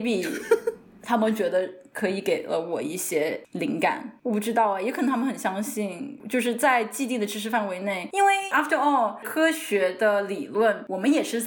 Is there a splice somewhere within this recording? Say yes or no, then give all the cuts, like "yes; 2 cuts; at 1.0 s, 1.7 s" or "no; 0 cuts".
no; 0 cuts